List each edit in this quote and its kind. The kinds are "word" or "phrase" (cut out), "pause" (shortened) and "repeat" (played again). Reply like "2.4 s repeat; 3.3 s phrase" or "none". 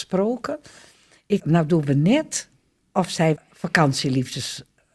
1.4 s word; 3.4 s word